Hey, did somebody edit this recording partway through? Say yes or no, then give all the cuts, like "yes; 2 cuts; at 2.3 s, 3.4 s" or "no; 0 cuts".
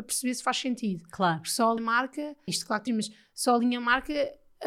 yes; 3 cuts; at 1.8 s, 2.5 s, 2.9 s